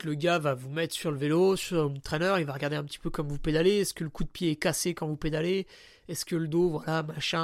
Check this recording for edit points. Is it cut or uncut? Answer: uncut